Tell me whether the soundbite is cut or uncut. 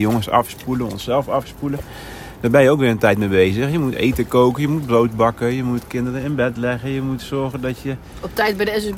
uncut